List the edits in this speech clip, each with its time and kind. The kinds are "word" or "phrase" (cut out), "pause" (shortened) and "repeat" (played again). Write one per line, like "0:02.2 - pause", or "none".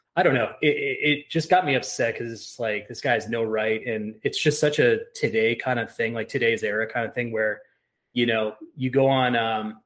none